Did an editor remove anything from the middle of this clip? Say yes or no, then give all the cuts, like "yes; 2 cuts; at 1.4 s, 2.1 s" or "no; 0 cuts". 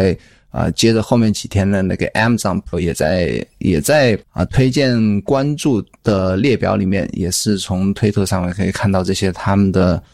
yes; 2 cuts; at 2.7 s, 4.2 s